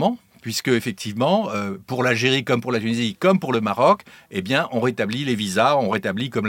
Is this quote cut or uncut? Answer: uncut